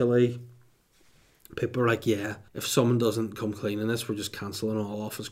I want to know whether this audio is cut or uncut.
cut